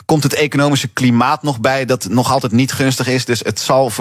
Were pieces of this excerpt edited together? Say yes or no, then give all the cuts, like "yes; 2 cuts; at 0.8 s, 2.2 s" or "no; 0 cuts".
no; 0 cuts